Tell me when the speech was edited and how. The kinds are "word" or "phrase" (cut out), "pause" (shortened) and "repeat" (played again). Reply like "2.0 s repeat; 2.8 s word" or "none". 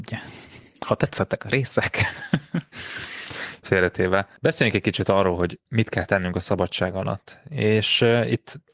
3.6 s word; 4.4 s pause